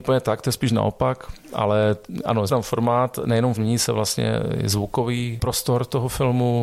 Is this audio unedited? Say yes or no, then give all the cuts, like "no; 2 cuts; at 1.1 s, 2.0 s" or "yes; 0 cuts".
no; 2 cuts; at 2.5 s, 3.6 s